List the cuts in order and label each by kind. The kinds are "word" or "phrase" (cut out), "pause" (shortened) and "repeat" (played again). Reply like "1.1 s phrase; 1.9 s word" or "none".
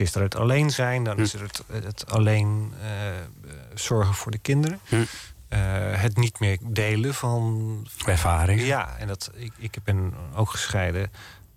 none